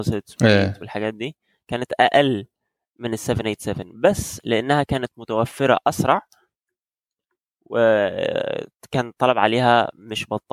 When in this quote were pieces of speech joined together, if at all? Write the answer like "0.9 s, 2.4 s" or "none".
none